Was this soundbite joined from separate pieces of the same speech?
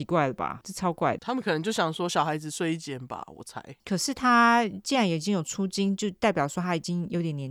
yes; 2 cuts; at 1.2 s, 3.8 s

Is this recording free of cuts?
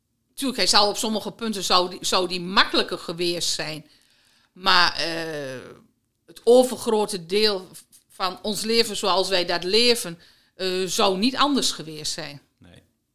yes; 0 cuts

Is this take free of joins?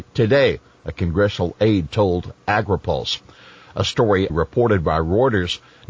no; 1 cut; at 4.3 s

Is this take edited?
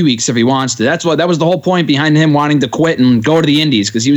no; 0 cuts

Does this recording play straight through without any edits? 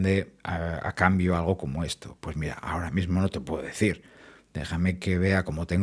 yes; 0 cuts

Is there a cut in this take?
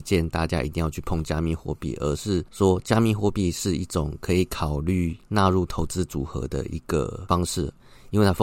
no; 0 cuts

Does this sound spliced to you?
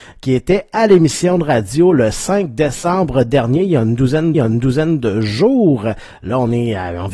yes; 1 cut; at 4.3 s

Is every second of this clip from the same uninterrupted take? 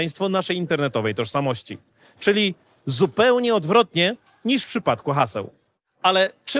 yes; 0 cuts

